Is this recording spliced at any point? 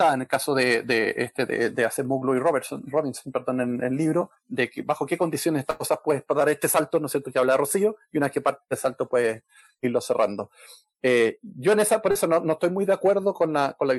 no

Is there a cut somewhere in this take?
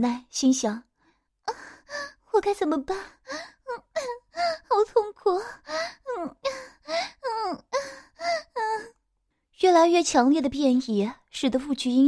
no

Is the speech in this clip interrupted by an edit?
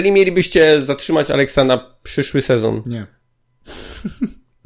no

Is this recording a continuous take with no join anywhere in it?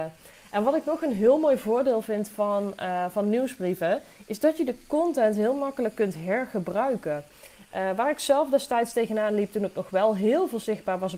yes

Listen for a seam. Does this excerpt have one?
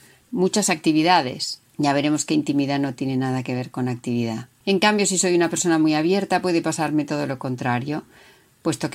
yes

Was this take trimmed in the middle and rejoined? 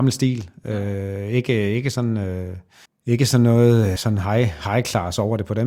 yes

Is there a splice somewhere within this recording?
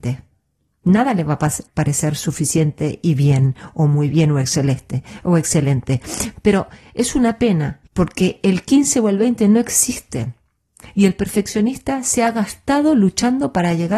yes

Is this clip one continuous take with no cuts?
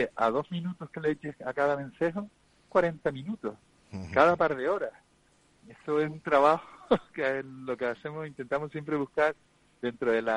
no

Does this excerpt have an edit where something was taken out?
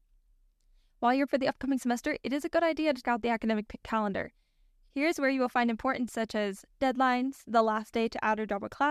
yes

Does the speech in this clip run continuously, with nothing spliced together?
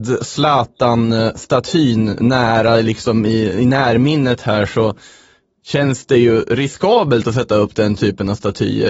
yes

